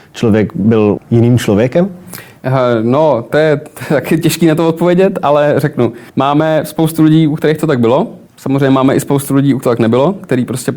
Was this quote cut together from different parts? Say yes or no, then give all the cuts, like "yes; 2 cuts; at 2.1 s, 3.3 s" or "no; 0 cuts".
yes; 5 cuts; at 1.0 s, 3.3 s, 6.1 s, 8.3 s, 9.6 s